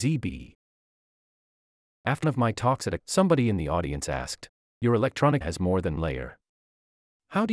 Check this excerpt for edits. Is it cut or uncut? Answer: cut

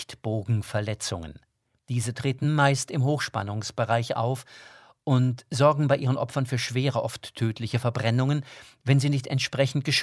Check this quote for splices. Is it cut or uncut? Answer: uncut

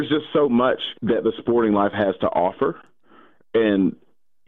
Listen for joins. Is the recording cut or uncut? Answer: cut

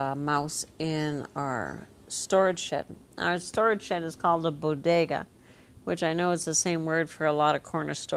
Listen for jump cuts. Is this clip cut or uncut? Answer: uncut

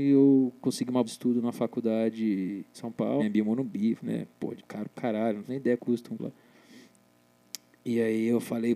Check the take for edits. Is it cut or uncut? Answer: cut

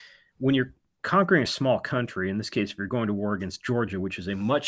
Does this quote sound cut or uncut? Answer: uncut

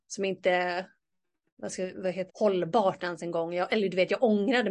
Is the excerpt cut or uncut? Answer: cut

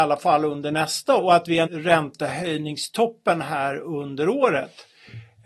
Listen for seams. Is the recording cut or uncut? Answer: cut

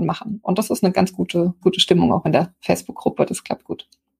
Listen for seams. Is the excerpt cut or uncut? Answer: cut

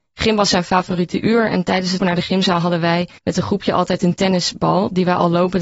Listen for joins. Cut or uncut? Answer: cut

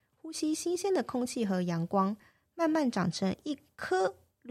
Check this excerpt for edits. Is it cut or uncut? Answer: uncut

